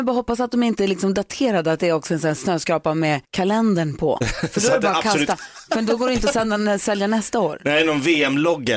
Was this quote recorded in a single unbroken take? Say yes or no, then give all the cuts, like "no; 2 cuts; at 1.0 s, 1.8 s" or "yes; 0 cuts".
no; 1 cut; at 3.2 s